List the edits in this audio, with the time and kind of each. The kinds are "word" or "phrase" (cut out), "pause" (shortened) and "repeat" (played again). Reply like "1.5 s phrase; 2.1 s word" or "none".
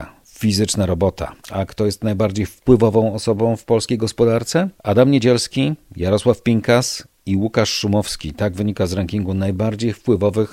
1.4 s pause; 4.8 s pause